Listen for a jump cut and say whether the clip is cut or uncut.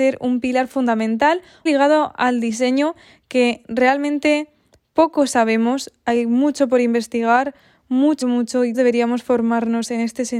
cut